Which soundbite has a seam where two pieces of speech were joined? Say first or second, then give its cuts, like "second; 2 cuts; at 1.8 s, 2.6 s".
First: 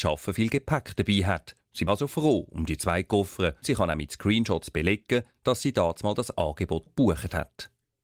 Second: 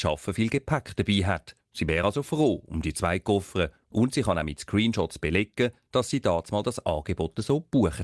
first; 3 cuts; at 1.9 s, 3.6 s, 6.9 s